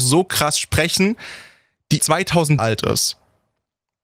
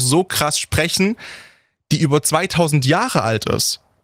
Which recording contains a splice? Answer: first; 2 cuts; at 2.0 s, 2.6 s

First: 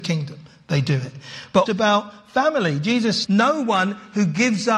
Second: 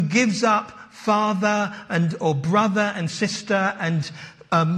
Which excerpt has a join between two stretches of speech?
first; 2 cuts; at 1.7 s, 3.2 s

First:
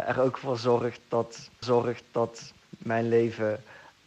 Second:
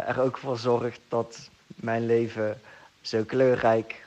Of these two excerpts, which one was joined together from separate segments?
first; 1 cut; at 1.6 s

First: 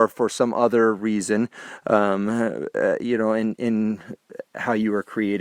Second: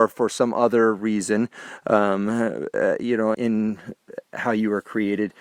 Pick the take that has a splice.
second; 1 cut; at 3.3 s

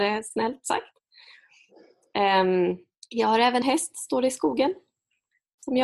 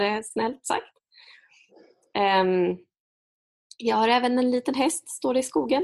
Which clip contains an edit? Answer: first; 2 cuts; at 3.0 s, 3.6 s

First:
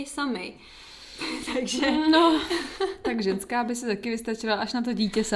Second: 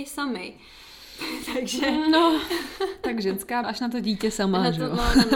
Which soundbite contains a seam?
second; 1 cut; at 3.6 s

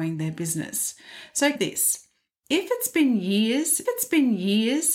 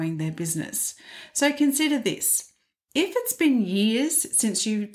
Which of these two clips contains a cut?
first; 2 cuts; at 1.6 s, 3.9 s

